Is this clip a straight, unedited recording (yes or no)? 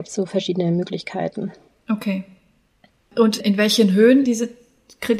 no